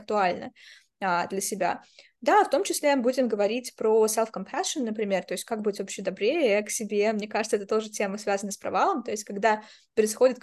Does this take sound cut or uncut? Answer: uncut